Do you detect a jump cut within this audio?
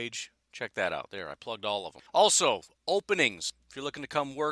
yes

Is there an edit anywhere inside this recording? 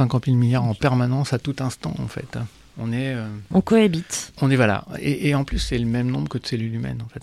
no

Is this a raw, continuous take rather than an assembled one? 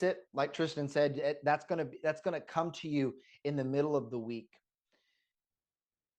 yes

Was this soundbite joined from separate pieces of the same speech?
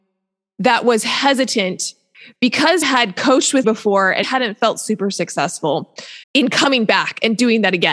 yes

